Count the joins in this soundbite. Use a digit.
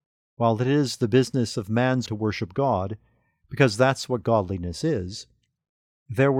1